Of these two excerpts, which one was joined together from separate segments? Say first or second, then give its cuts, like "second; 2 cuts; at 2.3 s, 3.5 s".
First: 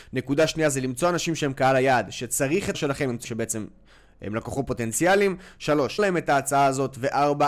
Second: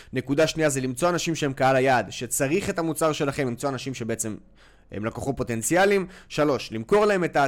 first; 3 cuts; at 2.7 s, 3.2 s, 6.0 s